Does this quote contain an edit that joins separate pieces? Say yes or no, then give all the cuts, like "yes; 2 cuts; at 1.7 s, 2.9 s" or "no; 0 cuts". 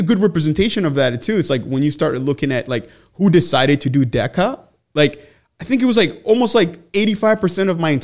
no; 0 cuts